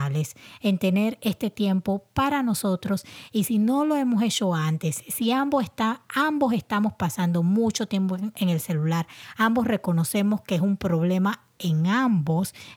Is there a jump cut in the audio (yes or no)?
no